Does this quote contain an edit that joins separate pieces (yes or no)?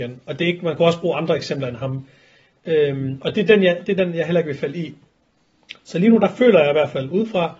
no